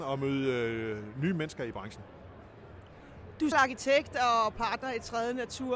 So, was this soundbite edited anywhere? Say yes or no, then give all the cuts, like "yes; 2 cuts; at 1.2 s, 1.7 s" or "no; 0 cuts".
yes; 1 cut; at 3.5 s